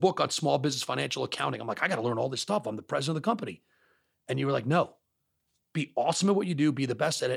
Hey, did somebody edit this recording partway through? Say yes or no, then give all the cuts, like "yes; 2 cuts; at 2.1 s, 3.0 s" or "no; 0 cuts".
no; 0 cuts